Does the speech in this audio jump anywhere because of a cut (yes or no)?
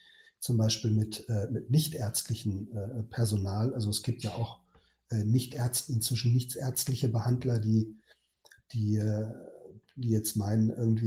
no